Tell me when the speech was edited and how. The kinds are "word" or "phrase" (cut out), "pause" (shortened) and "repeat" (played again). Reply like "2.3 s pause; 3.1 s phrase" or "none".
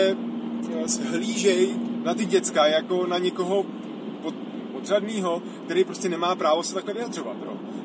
none